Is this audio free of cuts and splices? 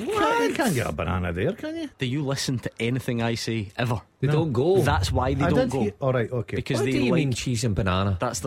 no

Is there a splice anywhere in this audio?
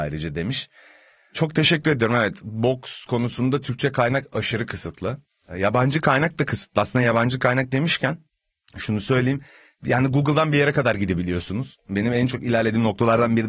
no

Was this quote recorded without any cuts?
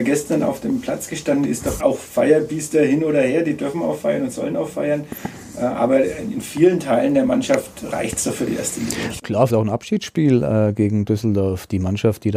no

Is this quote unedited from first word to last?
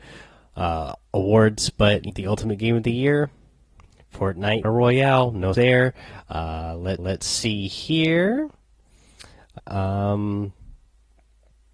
no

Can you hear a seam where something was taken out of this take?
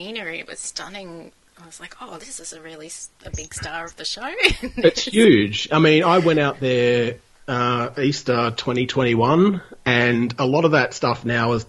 no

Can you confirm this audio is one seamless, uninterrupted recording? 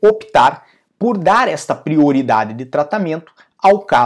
yes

